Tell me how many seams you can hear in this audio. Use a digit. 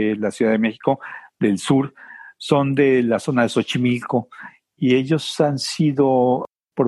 0